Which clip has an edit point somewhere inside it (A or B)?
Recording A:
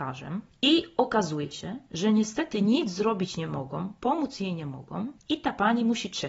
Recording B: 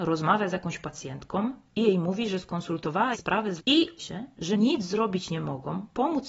B